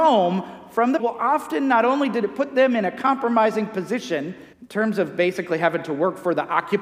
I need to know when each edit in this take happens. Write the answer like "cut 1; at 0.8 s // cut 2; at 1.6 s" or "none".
cut 1; at 1.0 s // cut 2; at 4.5 s

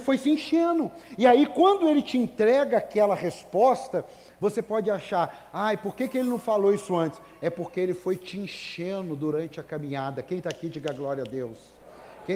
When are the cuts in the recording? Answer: none

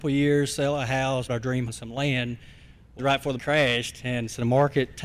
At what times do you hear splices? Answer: cut 1; at 1.3 s // cut 2; at 1.7 s // cut 3; at 3.0 s // cut 4; at 3.4 s

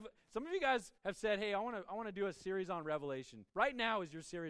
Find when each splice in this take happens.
cut 1; at 1.0 s // cut 2; at 3.5 s

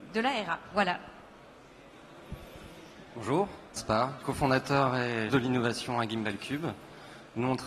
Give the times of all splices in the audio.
cut 1; at 3.8 s // cut 2; at 4.2 s // cut 3; at 5.3 s

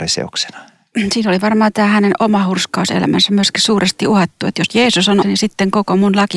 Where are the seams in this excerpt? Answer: cut 1; at 5.2 s

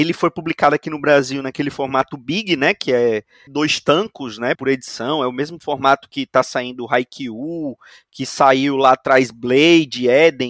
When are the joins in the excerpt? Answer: cut 1; at 3.5 s // cut 2; at 4.5 s

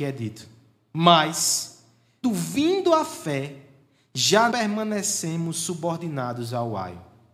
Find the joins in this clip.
cut 1; at 2.2 s // cut 2; at 4.5 s

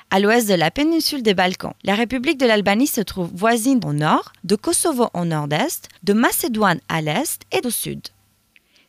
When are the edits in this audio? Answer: cut 1; at 1.8 s // cut 2; at 3.8 s // cut 3; at 4.4 s // cut 4; at 6.0 s // cut 5; at 7.6 s

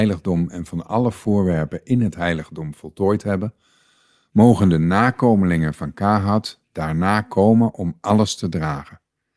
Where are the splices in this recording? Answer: none

